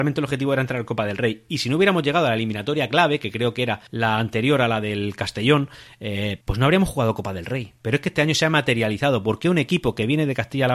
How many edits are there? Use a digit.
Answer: 2